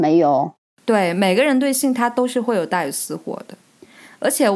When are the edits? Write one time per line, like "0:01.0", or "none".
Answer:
none